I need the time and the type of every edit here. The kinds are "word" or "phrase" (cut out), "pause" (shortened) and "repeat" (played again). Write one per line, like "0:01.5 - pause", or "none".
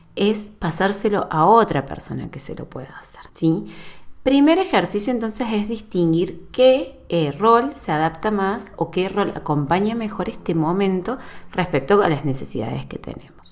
0:03.3 - pause